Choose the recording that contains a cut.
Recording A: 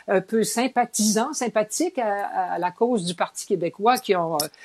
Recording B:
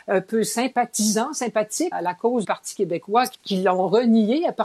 B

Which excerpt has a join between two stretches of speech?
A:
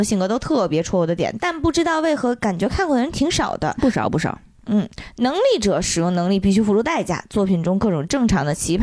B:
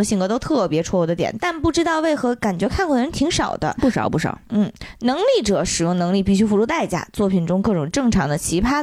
B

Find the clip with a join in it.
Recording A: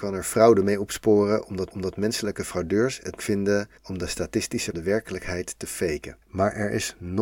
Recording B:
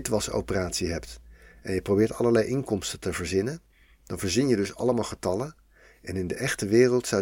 A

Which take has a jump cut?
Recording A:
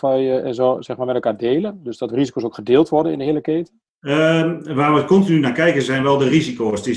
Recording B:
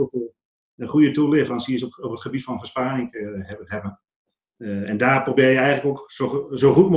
A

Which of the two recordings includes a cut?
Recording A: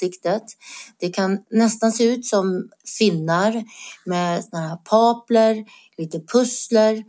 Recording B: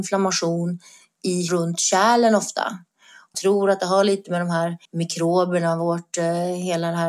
B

